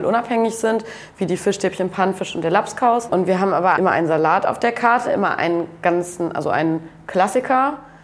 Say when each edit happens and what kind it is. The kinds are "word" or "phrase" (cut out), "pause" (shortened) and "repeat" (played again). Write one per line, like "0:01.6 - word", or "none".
0:03.8 - word